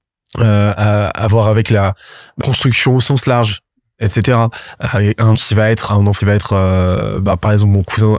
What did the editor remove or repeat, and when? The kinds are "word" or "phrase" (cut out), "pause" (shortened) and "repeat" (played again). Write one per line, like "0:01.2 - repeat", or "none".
0:02.4 - word
0:05.3 - word
0:05.9 - word
0:06.2 - word